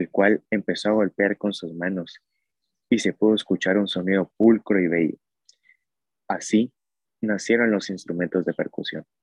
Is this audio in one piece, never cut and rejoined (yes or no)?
yes